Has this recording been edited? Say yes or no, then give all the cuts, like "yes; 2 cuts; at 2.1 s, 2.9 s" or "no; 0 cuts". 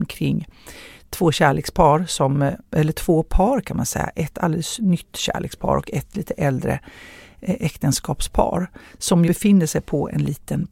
yes; 1 cut; at 9.3 s